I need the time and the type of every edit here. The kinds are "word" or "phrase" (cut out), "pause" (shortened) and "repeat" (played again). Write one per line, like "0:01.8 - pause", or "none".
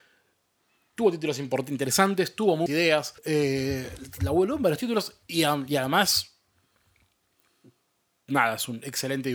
0:02.7 - word
0:03.2 - pause
0:05.2 - pause